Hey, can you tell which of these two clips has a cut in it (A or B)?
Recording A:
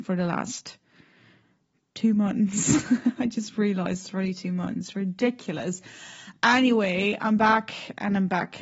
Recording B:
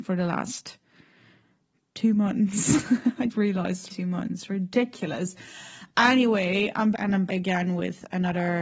B